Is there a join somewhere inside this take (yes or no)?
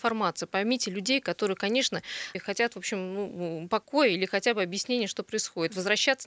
yes